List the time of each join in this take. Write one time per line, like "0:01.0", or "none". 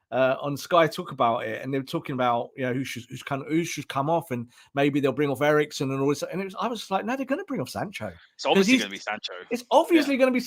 none